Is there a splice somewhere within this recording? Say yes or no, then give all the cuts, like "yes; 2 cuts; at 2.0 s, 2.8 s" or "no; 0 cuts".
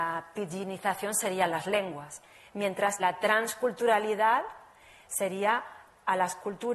yes; 1 cut; at 3.0 s